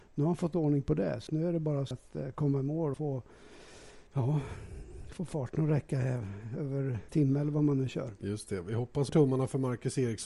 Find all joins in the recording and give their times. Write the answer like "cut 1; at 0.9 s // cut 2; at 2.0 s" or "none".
cut 1; at 1.3 s // cut 2; at 1.9 s // cut 3; at 2.9 s // cut 4; at 4.1 s // cut 5; at 7.1 s // cut 6; at 9.1 s